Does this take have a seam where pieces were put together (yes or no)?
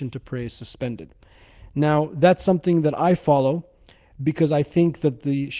no